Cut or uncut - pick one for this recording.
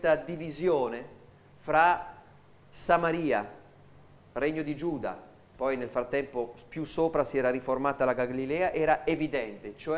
uncut